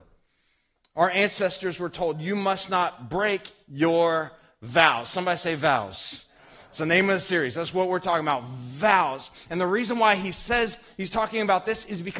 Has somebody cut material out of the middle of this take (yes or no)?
no